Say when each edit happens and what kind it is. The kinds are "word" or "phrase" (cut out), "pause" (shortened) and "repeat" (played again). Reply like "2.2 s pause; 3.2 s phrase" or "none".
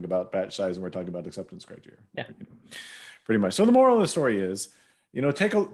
none